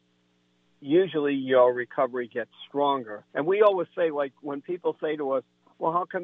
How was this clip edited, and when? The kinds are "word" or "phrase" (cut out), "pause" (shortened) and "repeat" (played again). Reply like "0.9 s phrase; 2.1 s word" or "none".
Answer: 3.3 s pause